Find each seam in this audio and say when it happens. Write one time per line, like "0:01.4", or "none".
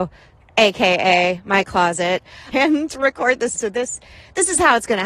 0:02.5
0:03.5